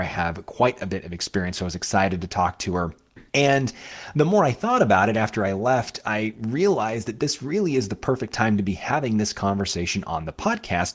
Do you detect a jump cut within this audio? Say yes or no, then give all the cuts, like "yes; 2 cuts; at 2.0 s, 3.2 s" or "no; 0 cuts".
yes; 1 cut; at 3.3 s